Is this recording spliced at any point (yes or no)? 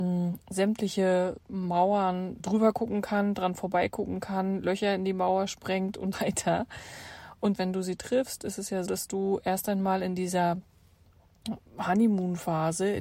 yes